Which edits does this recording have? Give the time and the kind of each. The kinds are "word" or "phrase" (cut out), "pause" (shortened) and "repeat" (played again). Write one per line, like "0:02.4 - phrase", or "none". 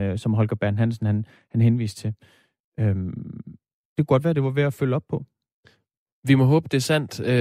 none